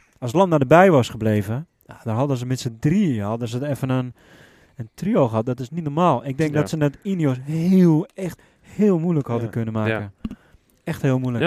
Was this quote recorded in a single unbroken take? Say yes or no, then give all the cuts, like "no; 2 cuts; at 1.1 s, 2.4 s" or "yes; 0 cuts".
yes; 0 cuts